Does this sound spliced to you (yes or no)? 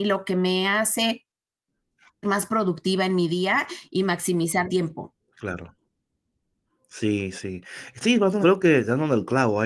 yes